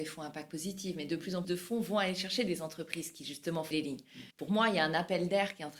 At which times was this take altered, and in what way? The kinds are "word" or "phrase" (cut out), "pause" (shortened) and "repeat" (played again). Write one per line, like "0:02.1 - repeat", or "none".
0:01.4 - word
0:03.7 - word
0:04.3 - pause